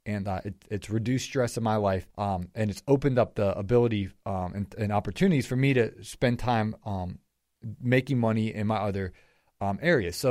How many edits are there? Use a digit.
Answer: 1